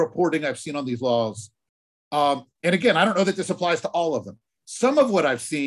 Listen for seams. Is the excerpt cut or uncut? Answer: uncut